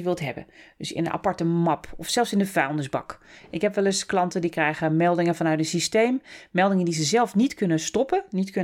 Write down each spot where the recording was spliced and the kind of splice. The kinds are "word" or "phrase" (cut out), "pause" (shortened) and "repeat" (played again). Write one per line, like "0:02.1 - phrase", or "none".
none